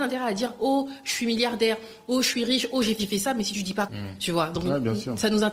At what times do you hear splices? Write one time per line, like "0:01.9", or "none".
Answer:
0:03.0
0:03.9